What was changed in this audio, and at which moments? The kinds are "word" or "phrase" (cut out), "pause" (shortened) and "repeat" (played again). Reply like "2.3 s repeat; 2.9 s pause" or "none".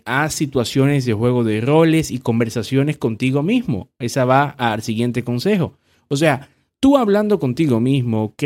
none